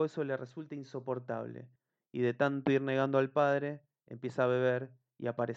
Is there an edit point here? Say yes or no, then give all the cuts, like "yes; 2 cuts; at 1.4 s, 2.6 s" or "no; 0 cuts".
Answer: no; 0 cuts